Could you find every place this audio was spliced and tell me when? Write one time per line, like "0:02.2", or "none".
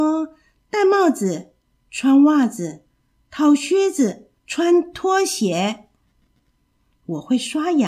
0:04.4